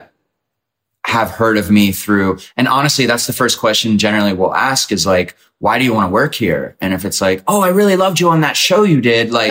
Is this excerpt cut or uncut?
uncut